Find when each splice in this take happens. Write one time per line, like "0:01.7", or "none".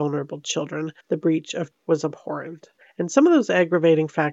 0:01.0
0:01.7
0:02.8